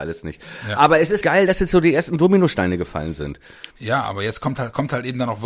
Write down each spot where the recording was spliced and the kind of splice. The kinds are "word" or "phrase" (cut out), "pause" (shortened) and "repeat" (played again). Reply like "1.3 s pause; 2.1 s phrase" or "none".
1.2 s word; 3.7 s pause